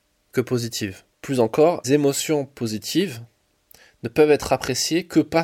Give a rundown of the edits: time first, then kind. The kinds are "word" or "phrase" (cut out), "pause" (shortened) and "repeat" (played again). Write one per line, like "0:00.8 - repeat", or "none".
0:01.1 - pause
0:01.8 - word